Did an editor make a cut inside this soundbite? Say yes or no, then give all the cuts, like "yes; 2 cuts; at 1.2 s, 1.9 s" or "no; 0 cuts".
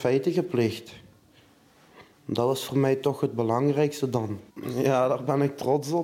yes; 1 cut; at 4.5 s